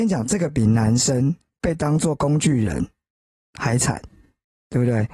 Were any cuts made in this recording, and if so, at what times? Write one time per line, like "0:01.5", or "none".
none